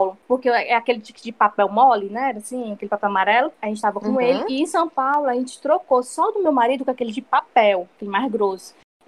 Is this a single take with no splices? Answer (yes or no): yes